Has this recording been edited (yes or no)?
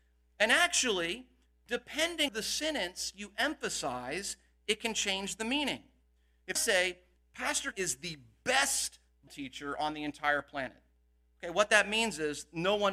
yes